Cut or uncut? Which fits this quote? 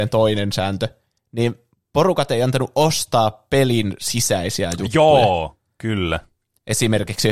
uncut